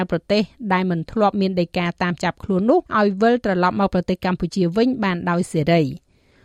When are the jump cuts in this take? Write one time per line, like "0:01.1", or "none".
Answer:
0:02.9